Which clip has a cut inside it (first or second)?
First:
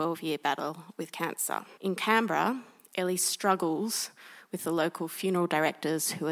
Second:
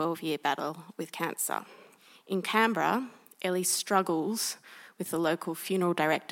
first